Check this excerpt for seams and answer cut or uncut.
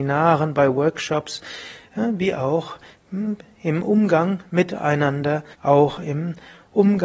cut